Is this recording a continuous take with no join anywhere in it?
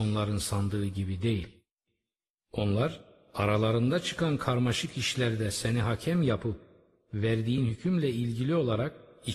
yes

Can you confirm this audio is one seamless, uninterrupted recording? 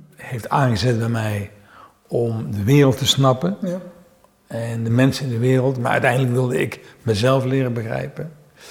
yes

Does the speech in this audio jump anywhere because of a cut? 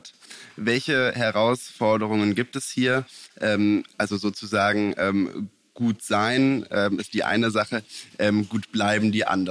no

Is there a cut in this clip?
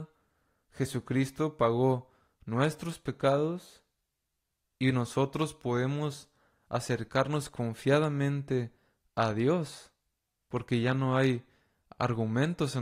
no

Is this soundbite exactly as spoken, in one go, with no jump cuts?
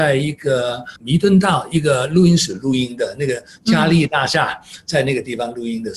no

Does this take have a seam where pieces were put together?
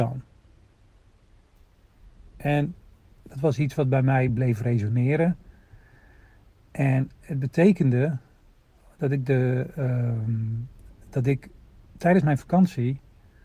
no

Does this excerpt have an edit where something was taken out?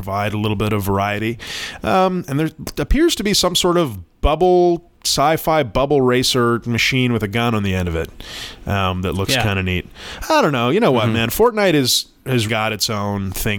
yes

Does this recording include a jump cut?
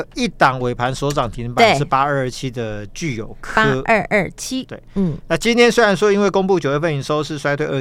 no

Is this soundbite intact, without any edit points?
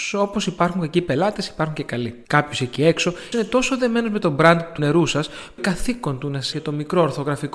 no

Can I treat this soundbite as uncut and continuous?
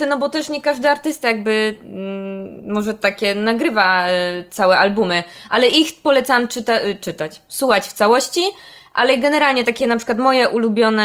yes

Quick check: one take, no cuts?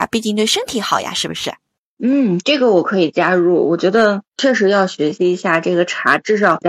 yes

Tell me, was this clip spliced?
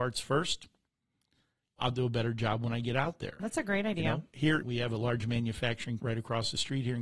yes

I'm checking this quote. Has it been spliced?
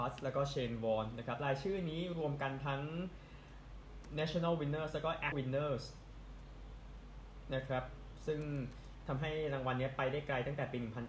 yes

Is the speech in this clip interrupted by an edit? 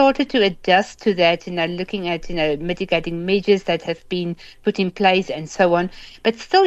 no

